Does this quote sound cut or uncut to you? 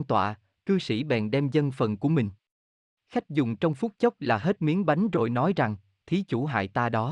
uncut